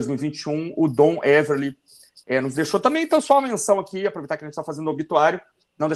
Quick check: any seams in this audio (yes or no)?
no